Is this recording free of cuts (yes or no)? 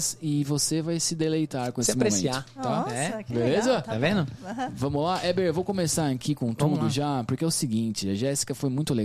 yes